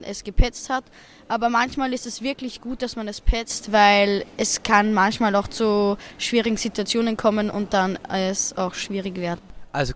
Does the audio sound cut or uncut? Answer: uncut